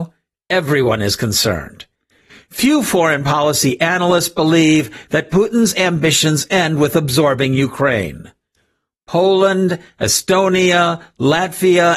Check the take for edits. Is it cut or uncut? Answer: uncut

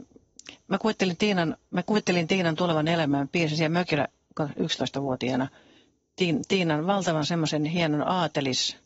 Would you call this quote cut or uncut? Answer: uncut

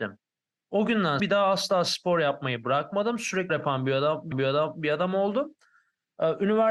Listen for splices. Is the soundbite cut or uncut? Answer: cut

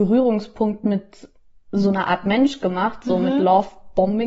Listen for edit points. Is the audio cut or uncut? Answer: uncut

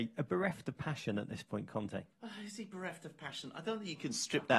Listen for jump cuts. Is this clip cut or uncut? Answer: cut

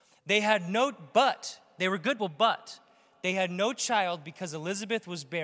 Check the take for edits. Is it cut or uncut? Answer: cut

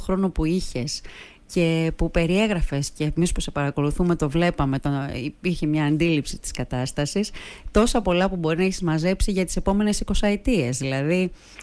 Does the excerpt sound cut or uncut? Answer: uncut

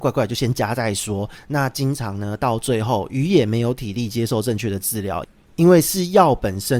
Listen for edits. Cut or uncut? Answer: uncut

